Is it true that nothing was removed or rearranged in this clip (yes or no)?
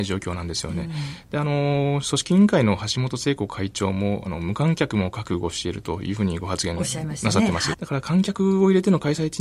no